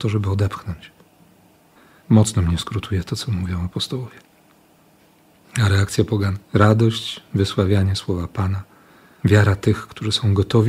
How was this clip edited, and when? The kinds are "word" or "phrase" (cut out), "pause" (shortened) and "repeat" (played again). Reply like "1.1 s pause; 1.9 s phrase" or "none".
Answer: 6.4 s pause